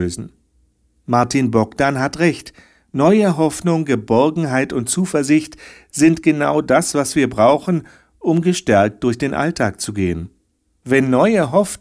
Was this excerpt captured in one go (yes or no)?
yes